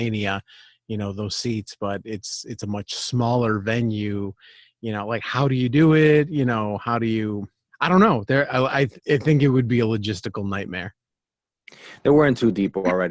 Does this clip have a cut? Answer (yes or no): yes